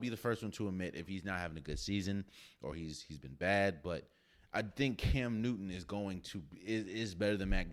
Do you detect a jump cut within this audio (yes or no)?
no